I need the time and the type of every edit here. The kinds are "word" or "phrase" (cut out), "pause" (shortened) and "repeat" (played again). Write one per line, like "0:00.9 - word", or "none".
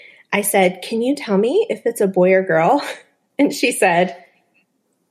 none